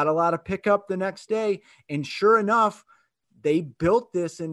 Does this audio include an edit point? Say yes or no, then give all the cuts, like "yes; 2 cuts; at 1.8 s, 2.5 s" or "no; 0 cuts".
no; 0 cuts